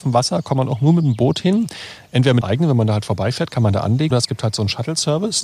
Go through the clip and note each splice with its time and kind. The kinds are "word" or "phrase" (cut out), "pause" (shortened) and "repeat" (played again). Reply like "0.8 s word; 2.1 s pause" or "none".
2.4 s word; 4.1 s word